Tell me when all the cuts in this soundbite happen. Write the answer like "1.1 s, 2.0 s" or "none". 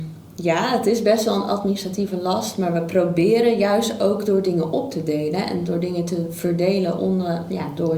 none